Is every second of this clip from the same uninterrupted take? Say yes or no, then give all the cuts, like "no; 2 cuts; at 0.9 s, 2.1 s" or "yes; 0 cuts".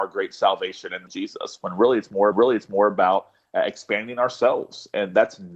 no; 2 cuts; at 1.1 s, 2.3 s